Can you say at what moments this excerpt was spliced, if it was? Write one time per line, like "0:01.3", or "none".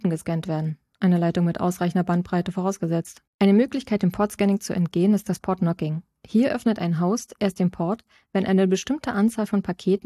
0:03.3